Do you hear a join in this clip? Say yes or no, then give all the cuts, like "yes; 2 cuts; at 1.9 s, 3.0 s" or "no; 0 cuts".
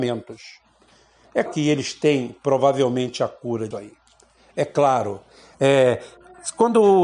yes; 2 cuts; at 1.5 s, 3.7 s